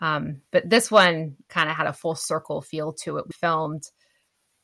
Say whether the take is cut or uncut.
cut